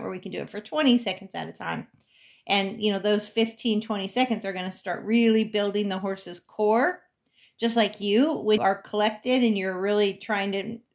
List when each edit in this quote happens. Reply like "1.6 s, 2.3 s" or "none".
8.6 s